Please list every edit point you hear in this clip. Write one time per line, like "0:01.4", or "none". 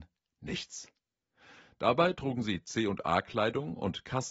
none